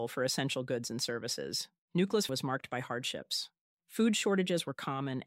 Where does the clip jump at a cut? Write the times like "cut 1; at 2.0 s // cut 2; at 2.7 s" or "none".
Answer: cut 1; at 2.3 s